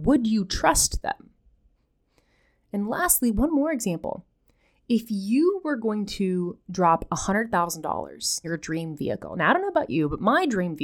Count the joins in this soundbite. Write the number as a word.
one